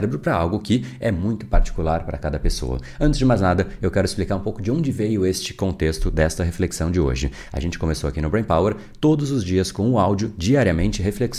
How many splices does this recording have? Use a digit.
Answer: 0